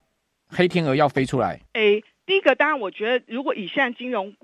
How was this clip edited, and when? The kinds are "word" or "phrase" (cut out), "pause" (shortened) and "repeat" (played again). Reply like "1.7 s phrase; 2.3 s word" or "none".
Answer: 1.7 s pause